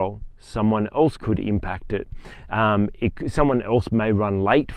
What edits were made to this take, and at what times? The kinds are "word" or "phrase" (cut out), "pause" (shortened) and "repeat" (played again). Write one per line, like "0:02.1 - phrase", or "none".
0:01.2 - word